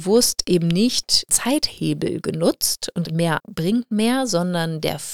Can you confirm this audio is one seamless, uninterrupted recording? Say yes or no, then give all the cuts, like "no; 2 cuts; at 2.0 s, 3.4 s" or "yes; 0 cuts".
no; 3 cuts; at 1.3 s, 3.0 s, 3.4 s